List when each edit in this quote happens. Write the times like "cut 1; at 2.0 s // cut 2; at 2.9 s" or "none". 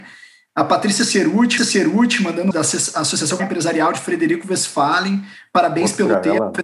cut 1; at 1.6 s // cut 2; at 2.5 s // cut 3; at 3.4 s